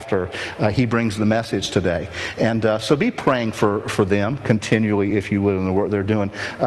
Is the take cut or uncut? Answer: uncut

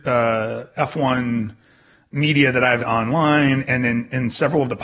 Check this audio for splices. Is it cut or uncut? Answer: cut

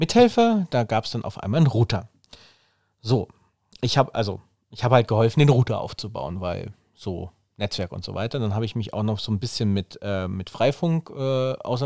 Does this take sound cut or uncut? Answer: uncut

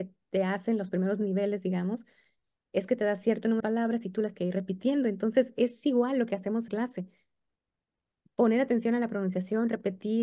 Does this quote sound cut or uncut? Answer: cut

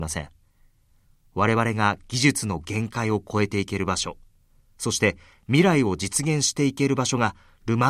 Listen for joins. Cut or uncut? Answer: uncut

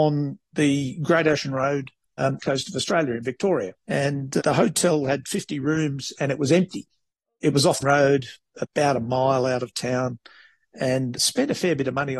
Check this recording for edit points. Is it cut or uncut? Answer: cut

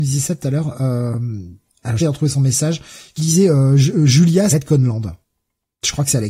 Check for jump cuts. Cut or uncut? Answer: cut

